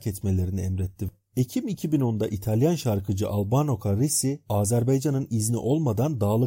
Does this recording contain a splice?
no; 0 cuts

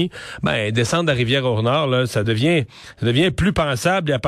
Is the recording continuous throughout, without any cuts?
yes; 0 cuts

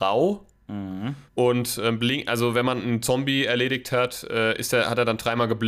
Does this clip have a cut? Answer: yes; 1 cut; at 1.3 s

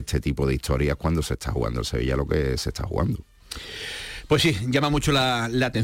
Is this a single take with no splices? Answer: yes; 0 cuts

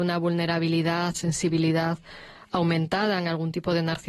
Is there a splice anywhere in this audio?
yes; 1 cut; at 1.1 s

